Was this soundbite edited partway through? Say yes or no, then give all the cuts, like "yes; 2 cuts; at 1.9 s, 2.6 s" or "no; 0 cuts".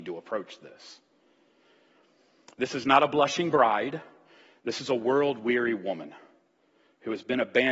no; 0 cuts